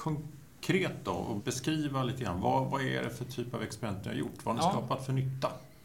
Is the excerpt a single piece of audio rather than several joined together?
yes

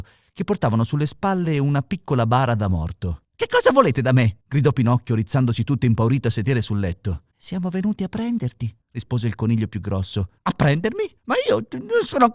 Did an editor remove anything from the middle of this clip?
yes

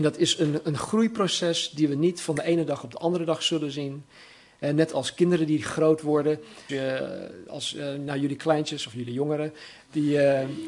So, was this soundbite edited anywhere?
yes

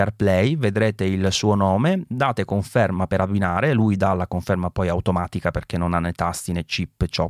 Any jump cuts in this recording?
no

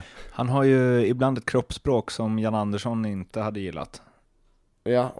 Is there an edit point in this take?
no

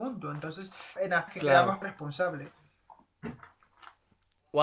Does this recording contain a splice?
yes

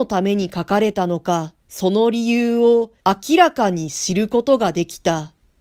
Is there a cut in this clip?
yes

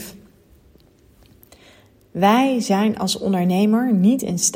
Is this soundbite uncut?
yes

